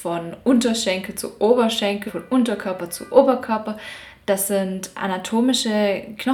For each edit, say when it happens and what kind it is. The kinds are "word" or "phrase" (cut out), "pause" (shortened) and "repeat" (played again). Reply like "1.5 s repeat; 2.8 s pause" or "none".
2.1 s word